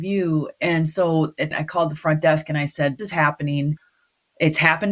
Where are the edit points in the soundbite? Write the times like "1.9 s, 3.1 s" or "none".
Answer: 1.5 s, 3.0 s